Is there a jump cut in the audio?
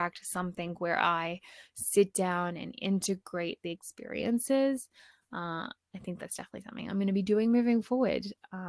no; 0 cuts

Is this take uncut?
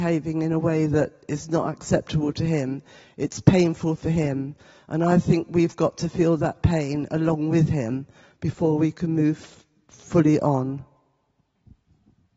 yes; 0 cuts

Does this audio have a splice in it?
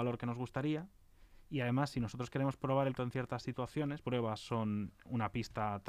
yes; 2 cuts; at 3.0 s, 4.0 s

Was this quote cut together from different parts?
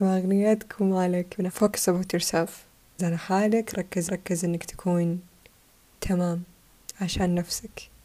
yes; 4 cuts; at 1.5 s, 3.0 s, 4.1 s, 5.7 s

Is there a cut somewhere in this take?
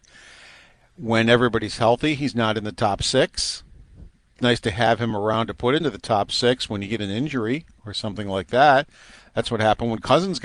yes; 1 cut; at 4.4 s

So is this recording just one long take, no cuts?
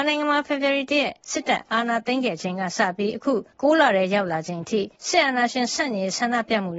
no; 2 cuts; at 3.5 s, 5.0 s

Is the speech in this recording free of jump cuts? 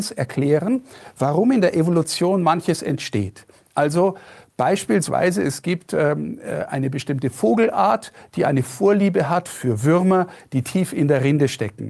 yes; 0 cuts

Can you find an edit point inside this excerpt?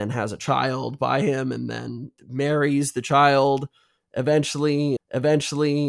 yes; 2 cuts; at 2.2 s, 5.0 s

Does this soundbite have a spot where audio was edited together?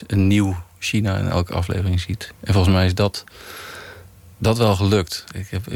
no; 0 cuts

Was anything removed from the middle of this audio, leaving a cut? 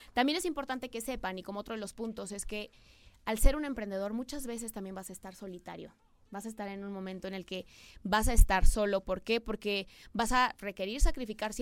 no; 0 cuts

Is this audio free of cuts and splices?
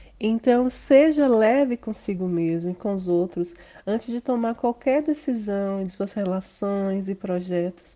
no; 1 cut; at 5.9 s

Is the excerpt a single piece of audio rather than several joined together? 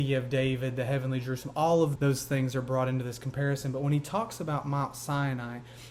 no; 1 cut; at 2.0 s

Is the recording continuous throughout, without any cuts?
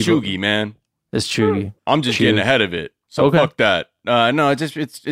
no; 2 cuts; at 1.8 s, 3.0 s

